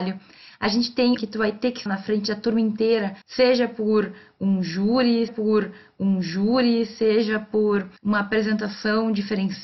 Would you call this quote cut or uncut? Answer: cut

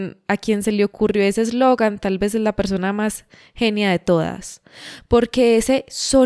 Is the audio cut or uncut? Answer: uncut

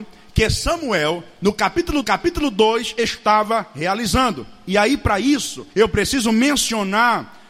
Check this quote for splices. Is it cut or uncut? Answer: cut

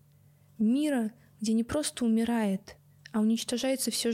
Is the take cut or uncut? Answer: uncut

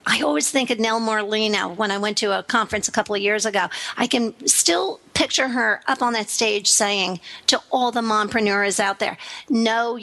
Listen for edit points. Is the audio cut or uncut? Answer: uncut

